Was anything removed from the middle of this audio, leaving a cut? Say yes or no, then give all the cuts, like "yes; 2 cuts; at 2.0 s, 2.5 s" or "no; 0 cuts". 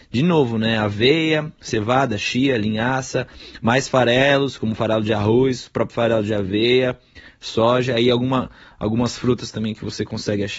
no; 0 cuts